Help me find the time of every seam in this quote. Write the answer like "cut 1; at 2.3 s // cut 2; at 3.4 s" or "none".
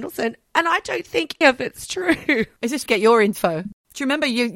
cut 1; at 1.4 s // cut 2; at 2.9 s